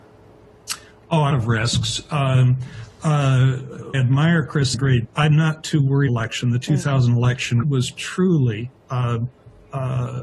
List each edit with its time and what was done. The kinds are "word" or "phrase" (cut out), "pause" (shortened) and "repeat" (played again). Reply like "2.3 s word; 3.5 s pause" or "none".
1.3 s phrase; 3.9 s phrase; 4.7 s word; 5.0 s word; 6.1 s phrase; 7.6 s word